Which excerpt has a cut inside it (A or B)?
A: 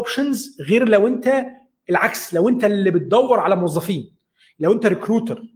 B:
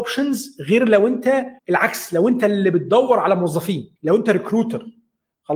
B